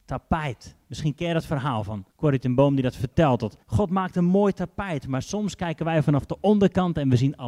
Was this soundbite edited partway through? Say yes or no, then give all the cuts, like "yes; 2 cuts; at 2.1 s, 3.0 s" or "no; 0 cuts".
yes; 2 cuts; at 2.1 s, 3.6 s